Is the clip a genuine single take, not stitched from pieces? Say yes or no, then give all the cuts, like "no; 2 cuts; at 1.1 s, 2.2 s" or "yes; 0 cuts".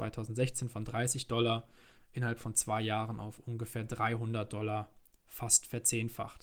yes; 0 cuts